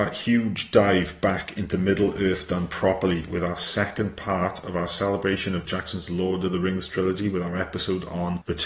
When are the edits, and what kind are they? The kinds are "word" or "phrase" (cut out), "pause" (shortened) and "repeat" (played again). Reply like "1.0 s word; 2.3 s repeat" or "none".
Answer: 5.7 s word